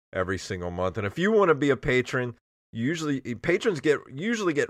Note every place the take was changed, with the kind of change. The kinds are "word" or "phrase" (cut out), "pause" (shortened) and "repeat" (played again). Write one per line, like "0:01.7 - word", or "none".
none